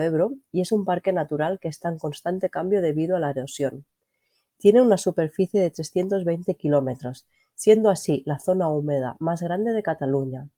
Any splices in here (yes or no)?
no